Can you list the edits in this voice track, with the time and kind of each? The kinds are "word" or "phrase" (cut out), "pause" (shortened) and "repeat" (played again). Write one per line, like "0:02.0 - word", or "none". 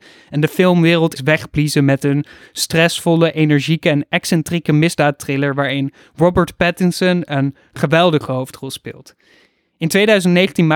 0:01.2 - word